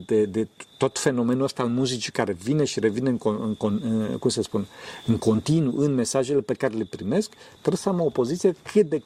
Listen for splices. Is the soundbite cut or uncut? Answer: uncut